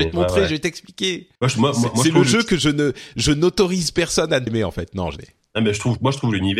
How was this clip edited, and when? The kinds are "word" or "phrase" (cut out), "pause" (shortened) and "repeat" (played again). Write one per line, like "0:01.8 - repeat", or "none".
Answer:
0:01.4 - pause
0:04.5 - word
0:05.2 - word